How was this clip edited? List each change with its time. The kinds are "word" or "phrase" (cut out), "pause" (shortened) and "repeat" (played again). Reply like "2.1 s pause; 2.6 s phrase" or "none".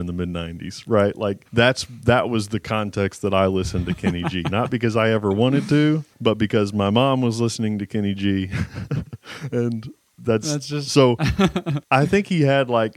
1.5 s pause; 6.1 s pause; 11.8 s pause

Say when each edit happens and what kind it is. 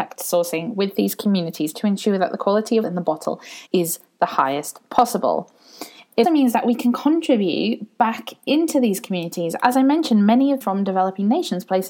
2.8 s word; 3.7 s pause; 6.2 s word; 10.6 s phrase

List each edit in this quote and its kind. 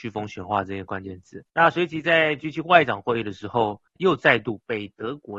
1.5 s pause; 3.9 s pause

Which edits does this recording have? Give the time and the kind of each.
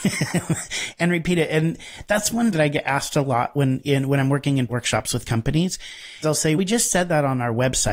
2.5 s word; 4.7 s word; 6.2 s word; 6.6 s word

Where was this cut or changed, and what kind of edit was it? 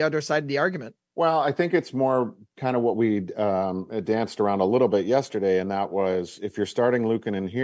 1.0 s pause

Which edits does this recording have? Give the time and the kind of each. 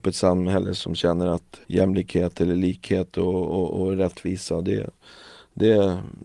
1.6 s pause

